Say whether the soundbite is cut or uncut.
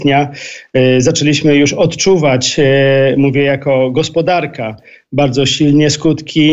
uncut